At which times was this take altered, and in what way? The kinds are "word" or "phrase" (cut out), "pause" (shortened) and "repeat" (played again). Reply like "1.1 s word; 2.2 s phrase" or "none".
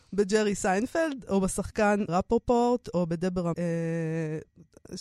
2.1 s word; 3.5 s word

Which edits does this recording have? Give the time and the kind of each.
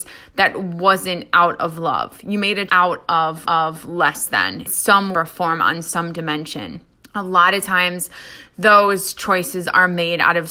2.7 s word; 3.4 s repeat; 4.7 s word; 5.1 s phrase; 7.0 s pause

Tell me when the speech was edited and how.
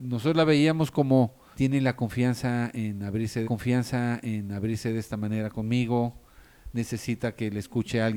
1.5 s word; 3.4 s repeat

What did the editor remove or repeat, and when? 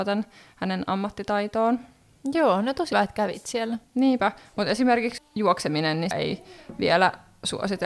2.9 s word; 5.2 s word; 6.1 s word

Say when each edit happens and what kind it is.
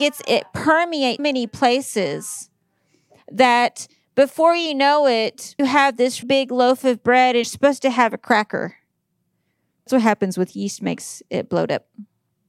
1.2 s word; 5.6 s word; 6.2 s word; 7.4 s word; 9.9 s word; 10.5 s word

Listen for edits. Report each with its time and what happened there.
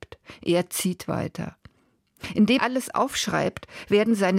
2.6 s word

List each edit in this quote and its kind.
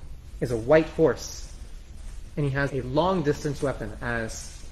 2.7 s word

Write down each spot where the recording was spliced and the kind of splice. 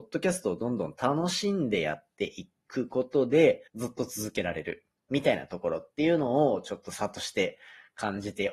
3.7 s pause

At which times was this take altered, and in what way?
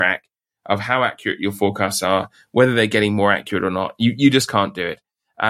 none

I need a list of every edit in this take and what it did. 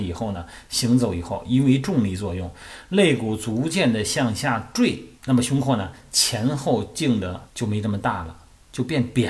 5.2 s pause; 7.5 s pause

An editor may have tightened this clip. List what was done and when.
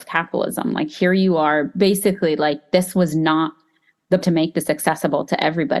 4.2 s phrase

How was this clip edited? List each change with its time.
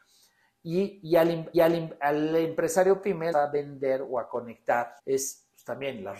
1.5 s repeat; 3.3 s phrase; 5.0 s pause

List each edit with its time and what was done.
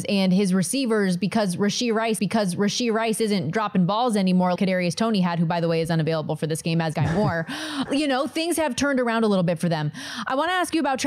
2.2 s repeat; 4.6 s word; 6.9 s word; 7.9 s word

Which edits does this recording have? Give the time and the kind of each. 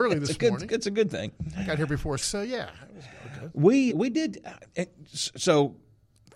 2.2 s word; 3.9 s word

